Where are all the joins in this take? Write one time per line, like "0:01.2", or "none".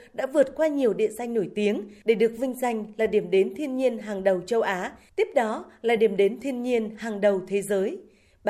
none